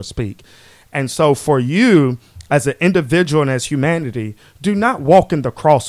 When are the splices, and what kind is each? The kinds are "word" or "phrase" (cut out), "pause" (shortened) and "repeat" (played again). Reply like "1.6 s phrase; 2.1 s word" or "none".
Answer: none